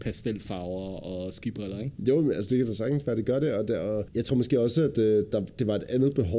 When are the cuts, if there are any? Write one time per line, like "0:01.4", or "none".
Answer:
none